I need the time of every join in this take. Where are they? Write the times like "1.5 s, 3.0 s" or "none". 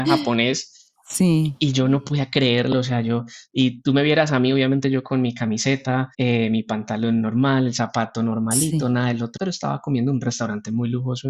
6.1 s, 9.4 s